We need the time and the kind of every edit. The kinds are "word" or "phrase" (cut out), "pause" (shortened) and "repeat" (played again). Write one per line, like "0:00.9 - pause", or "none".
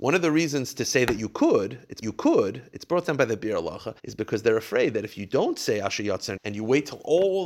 0:02.0 - repeat
0:04.0 - pause
0:06.4 - word